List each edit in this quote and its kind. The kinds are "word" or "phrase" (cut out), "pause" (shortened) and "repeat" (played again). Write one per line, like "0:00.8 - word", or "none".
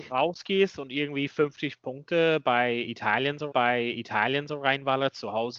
0:03.5 - repeat

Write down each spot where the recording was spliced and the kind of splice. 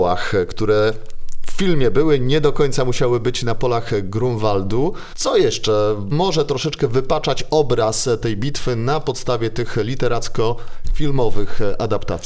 none

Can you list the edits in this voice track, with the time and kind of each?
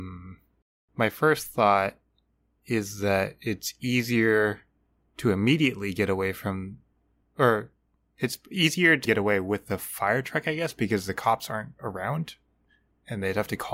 0:09.0 - word

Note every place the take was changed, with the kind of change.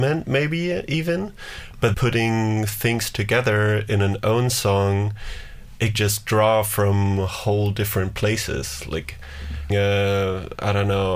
0:01.9 - word
0:06.0 - word
0:09.7 - word

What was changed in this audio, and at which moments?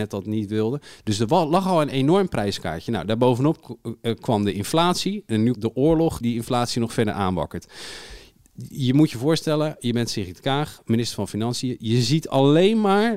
0:05.5 - word
0:06.2 - word

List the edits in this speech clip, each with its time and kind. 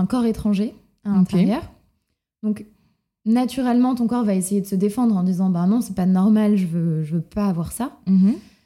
none

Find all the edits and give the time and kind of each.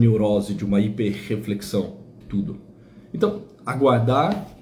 0:02.2 - word

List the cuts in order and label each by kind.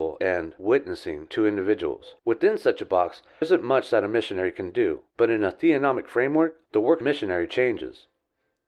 0:02.2 - pause
0:03.4 - word
0:05.1 - pause
0:06.7 - pause
0:07.0 - phrase

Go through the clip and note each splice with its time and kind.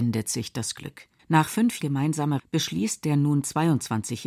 0:01.2 - pause
0:01.8 - word
0:02.4 - word

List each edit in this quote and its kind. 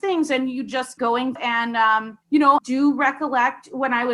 0:01.0 - word
0:01.4 - word
0:02.2 - pause
0:02.6 - word

